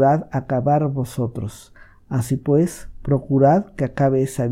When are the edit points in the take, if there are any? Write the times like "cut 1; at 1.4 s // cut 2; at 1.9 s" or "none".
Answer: none

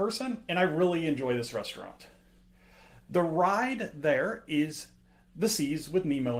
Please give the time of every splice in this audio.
none

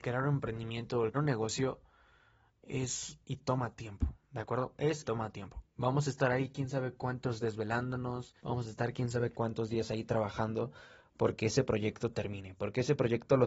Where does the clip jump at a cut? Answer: cut 1; at 1.1 s // cut 2; at 3.2 s // cut 3; at 5.0 s // cut 4; at 5.7 s // cut 5; at 7.4 s // cut 6; at 8.4 s

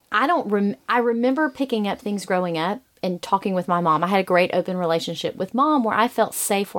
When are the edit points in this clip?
none

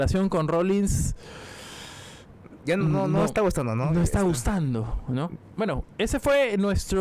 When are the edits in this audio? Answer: none

